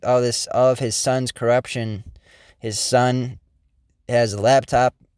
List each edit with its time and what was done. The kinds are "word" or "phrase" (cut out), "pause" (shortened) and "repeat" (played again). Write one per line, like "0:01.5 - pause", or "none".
none